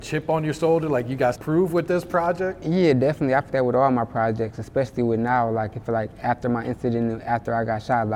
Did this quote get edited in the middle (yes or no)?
yes